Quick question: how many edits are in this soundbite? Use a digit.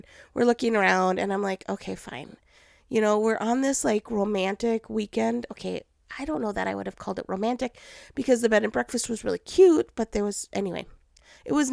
0